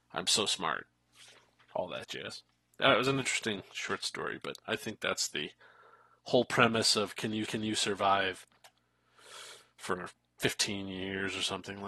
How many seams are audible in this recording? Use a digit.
1